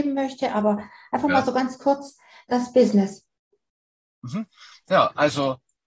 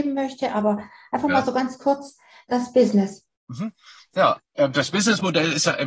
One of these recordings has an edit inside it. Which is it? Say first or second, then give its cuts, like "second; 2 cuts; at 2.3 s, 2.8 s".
second; 2 cuts; at 3.4 s, 4.4 s